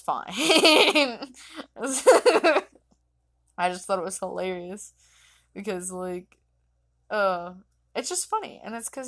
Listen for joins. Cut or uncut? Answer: uncut